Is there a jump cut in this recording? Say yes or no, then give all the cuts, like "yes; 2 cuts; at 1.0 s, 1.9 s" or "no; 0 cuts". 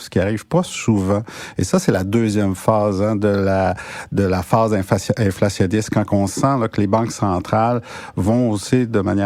no; 0 cuts